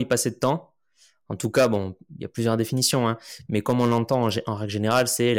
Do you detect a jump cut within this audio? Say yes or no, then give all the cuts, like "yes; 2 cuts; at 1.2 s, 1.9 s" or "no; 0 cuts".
no; 0 cuts